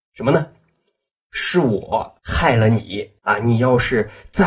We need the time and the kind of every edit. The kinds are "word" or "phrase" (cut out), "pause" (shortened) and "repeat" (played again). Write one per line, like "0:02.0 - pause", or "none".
0:02.2 - pause
0:03.2 - pause